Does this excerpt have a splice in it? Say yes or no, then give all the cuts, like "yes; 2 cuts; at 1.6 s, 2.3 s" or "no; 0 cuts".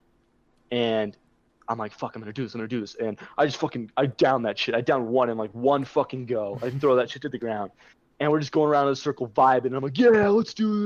no; 0 cuts